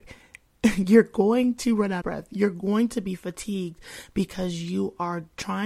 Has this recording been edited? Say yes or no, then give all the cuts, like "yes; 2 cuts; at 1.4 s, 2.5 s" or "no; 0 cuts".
yes; 1 cut; at 2.0 s